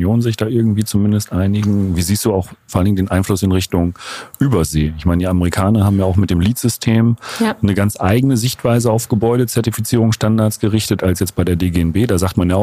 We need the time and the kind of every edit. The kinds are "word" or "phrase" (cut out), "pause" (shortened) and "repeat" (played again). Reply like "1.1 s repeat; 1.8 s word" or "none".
none